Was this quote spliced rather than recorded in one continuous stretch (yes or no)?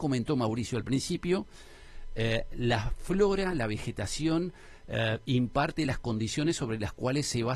no